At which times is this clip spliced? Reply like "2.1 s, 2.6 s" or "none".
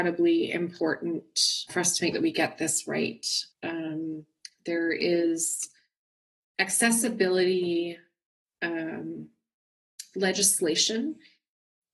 1.7 s, 2.1 s, 3.5 s